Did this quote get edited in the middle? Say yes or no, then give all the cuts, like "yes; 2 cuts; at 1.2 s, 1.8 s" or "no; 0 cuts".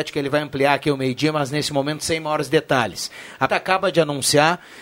yes; 1 cut; at 3.5 s